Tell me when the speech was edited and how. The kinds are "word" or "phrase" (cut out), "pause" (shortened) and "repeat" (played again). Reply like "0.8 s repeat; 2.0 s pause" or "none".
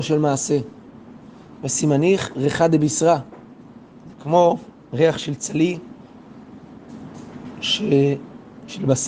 none